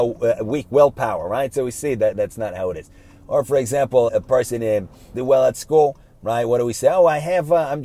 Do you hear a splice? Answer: yes; 3 cuts; at 2.1 s, 4.1 s, 5.1 s

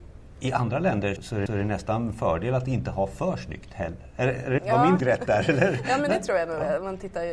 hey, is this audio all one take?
no; 4 cuts; at 1.2 s, 1.5 s, 4.6 s, 5.0 s

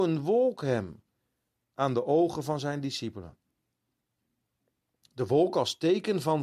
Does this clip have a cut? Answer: no; 0 cuts

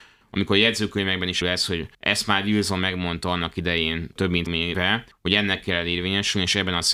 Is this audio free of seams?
no; 3 cuts; at 1.4 s, 1.9 s, 4.5 s

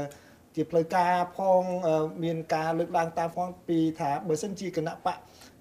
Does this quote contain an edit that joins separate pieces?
yes; 1 cut; at 3.3 s

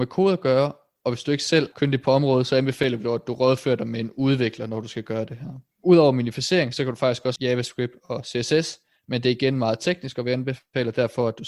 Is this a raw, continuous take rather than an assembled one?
no; 3 cuts; at 1.7 s, 5.7 s, 7.4 s

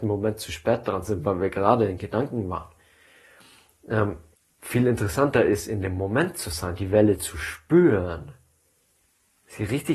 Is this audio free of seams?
no; 1 cut; at 4.3 s

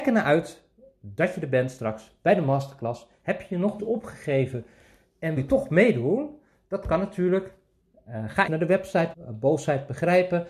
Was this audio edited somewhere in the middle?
yes; 4 cuts; at 3.8 s, 5.4 s, 8.5 s, 9.1 s

